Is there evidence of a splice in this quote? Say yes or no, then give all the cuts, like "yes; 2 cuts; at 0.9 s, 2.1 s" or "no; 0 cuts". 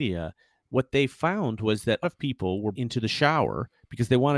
yes; 2 cuts; at 2.0 s, 2.7 s